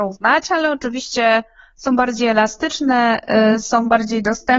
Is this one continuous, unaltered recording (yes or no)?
yes